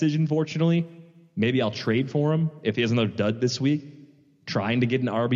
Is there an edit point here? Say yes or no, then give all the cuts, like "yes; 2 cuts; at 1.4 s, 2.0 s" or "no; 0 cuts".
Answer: no; 0 cuts